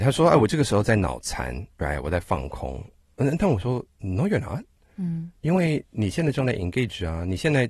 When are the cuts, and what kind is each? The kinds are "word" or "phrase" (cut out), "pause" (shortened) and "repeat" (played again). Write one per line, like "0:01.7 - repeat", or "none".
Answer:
0:03.9 - pause

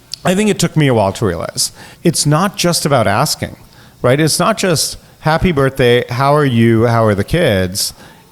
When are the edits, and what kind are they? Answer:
0:01.9 - pause

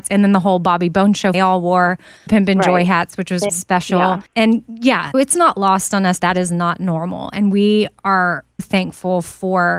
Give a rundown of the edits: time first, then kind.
0:01.3 - phrase
0:02.3 - word
0:03.5 - word
0:04.3 - pause
0:05.1 - word
0:06.2 - word
0:08.6 - word

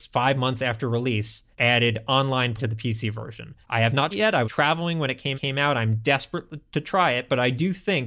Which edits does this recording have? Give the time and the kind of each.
0:01.5 - pause
0:02.6 - word
0:03.6 - pause
0:04.1 - word
0:04.4 - word
0:05.3 - repeat

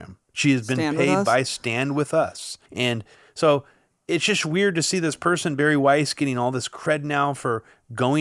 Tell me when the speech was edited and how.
0:02.7 - pause

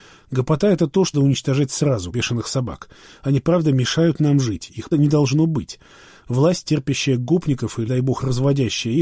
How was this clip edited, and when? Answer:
0:01.1 - word
0:02.1 - word
0:04.9 - word
0:07.9 - word

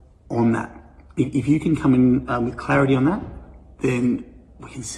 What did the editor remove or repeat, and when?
none

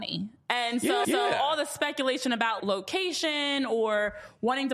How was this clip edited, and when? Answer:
0:01.0 - repeat
0:02.6 - word

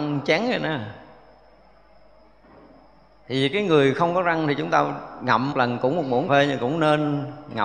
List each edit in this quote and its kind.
0:05.5 - word
0:06.3 - word

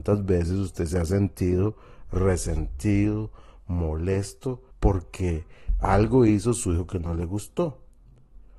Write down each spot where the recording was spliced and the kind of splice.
0:04.7 - pause

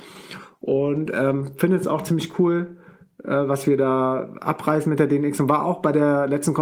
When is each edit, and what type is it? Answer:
none

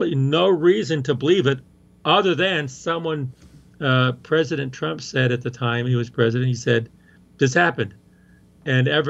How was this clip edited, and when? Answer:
none

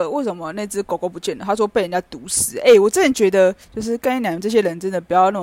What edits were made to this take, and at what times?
0:03.6 - pause

